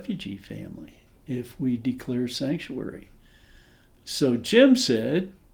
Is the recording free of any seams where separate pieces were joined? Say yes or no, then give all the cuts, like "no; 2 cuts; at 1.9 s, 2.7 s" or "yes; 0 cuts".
yes; 0 cuts